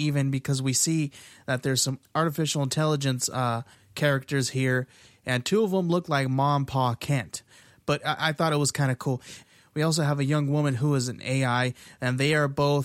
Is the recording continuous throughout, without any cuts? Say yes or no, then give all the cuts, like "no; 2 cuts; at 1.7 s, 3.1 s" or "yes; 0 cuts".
yes; 0 cuts